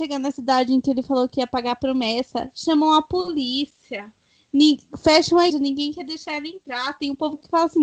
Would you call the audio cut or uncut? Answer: cut